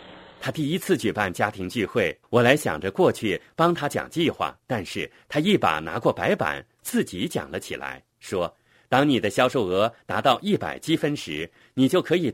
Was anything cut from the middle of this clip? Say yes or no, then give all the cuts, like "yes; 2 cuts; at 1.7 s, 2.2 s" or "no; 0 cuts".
yes; 3 cuts; at 2.2 s, 4.6 s, 8.1 s